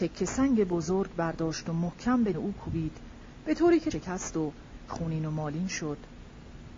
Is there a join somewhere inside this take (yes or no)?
yes